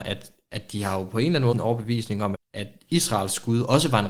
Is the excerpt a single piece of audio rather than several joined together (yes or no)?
no